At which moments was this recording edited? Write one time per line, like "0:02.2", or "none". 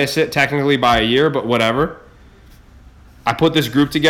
none